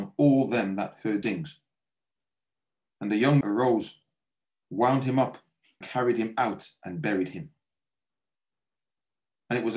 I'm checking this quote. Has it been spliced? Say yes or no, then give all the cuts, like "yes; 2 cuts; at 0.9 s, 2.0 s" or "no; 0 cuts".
yes; 3 cuts; at 1.2 s, 3.4 s, 5.8 s